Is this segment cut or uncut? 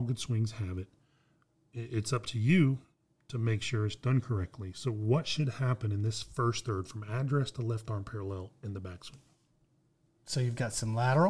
uncut